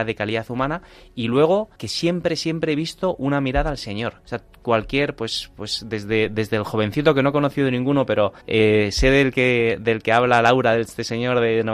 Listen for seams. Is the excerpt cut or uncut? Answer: cut